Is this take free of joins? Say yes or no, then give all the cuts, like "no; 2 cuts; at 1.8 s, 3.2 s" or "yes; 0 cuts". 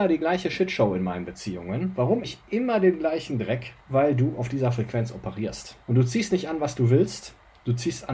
no; 3 cuts; at 2.2 s, 3.8 s, 5.8 s